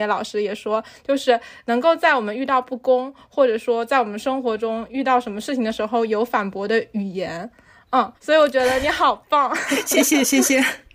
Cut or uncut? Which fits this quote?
cut